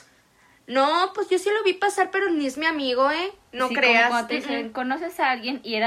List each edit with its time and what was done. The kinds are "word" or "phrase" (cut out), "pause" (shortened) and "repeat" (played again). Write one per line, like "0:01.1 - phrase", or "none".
none